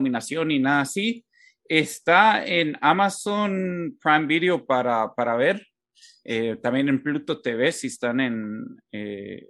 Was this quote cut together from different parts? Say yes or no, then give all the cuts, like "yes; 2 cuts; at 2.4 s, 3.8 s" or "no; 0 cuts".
no; 0 cuts